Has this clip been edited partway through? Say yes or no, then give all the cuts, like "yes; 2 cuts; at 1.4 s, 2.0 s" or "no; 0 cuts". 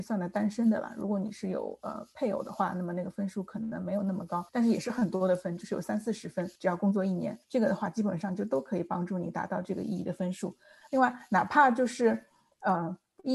yes; 3 cuts; at 4.5 s, 6.5 s, 7.4 s